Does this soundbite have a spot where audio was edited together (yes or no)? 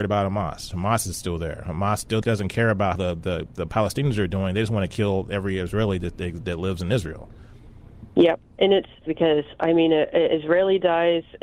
yes